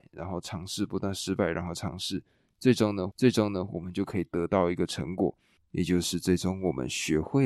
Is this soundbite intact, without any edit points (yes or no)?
no